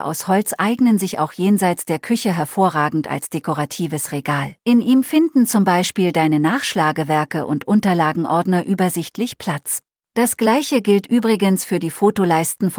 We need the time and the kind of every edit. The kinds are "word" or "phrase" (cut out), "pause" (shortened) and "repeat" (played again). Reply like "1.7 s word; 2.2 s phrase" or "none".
4.6 s pause; 9.9 s pause